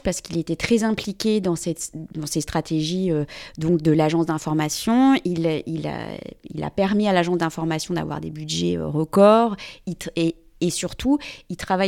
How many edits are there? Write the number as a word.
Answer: zero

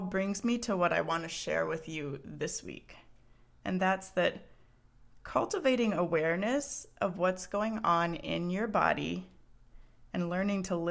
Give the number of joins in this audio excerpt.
zero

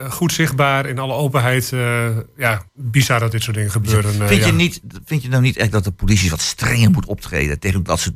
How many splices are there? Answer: one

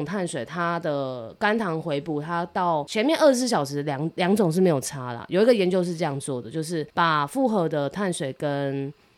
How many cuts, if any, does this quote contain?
one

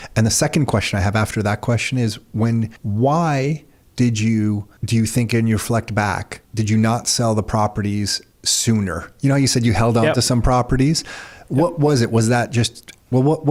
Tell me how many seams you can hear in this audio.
three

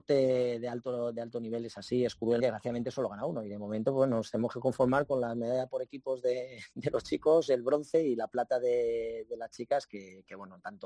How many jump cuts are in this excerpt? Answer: one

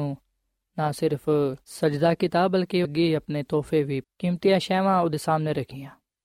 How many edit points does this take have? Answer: three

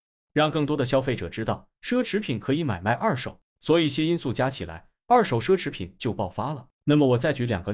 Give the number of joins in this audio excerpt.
two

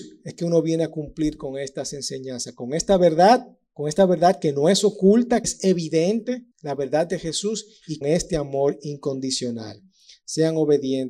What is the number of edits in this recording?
three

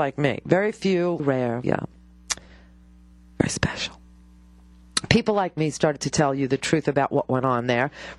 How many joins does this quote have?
two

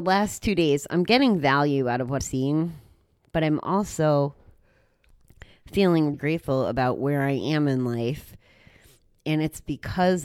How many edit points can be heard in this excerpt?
two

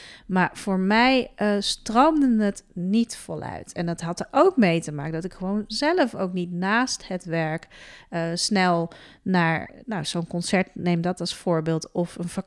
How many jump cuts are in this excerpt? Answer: zero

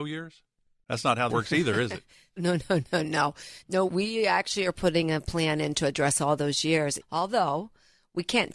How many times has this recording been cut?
four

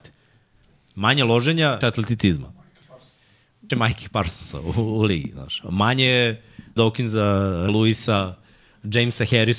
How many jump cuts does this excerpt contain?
four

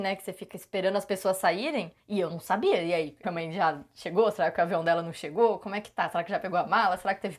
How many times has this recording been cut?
one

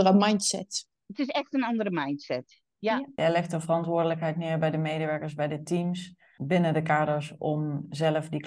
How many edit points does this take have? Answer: one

